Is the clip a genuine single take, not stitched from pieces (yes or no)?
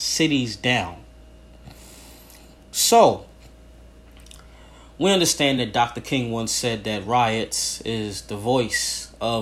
yes